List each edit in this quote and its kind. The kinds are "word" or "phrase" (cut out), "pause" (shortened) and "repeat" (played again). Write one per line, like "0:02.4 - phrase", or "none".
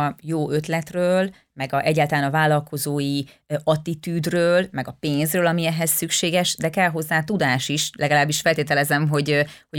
none

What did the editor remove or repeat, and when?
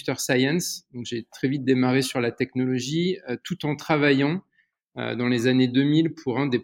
none

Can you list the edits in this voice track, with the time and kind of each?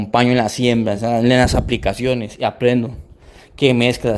none

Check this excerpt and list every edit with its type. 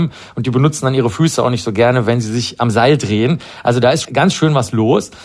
0:04.0 - word

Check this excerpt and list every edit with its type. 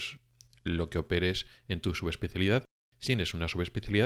0:03.0 - word

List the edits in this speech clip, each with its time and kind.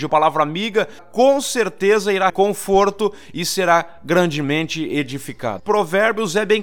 0:01.0 - word
0:02.3 - word

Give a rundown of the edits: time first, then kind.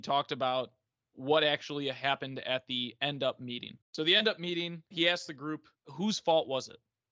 0:03.8 - pause
0:04.9 - pause
0:05.8 - pause

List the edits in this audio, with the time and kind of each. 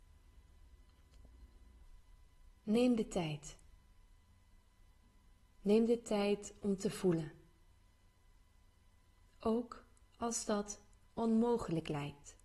none

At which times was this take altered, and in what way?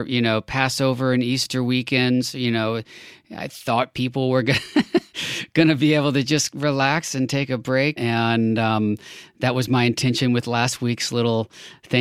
0:08.0 - word

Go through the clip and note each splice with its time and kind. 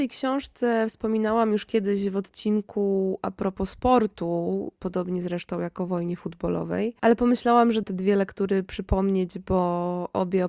0:07.0 - pause
0:07.8 - word

